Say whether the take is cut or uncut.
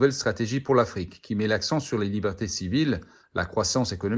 uncut